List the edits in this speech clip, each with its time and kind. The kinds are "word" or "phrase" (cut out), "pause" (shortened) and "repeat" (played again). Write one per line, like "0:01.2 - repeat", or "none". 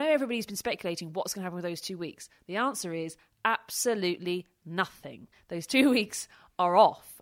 none